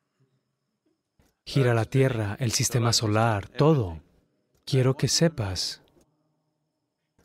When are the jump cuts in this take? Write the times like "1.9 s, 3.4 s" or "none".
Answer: none

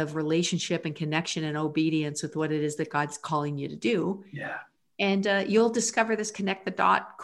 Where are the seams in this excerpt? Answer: none

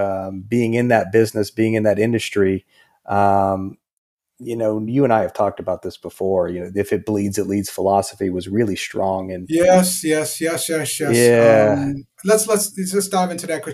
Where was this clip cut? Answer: none

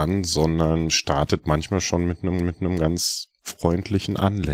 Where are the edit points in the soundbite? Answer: 2.4 s

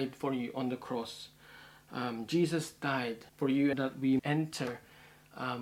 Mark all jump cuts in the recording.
3.3 s, 3.7 s, 4.2 s

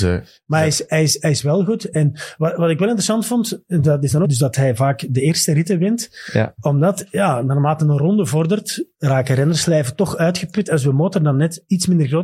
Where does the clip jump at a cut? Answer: 4.2 s, 8.9 s

